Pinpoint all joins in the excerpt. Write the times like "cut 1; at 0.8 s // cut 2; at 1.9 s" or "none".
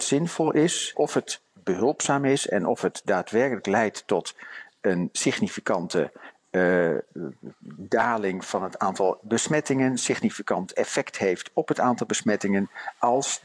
cut 1; at 0.9 s